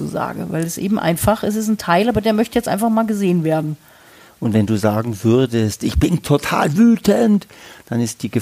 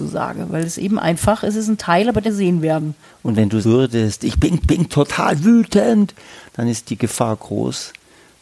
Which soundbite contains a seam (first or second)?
second